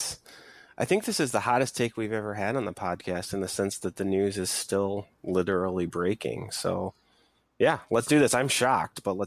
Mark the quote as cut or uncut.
uncut